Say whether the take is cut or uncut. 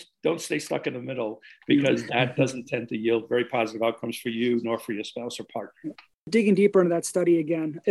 uncut